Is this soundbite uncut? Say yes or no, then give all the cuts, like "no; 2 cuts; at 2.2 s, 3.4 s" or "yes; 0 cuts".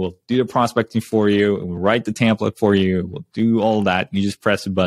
yes; 0 cuts